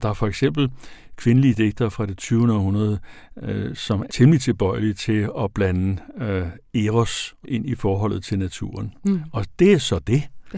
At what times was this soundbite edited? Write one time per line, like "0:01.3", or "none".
0:04.1
0:07.4